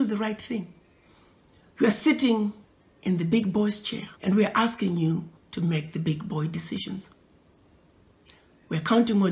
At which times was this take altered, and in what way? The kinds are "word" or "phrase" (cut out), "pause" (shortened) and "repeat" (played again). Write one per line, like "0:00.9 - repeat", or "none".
0:02.6 - pause
0:04.1 - pause
0:05.3 - pause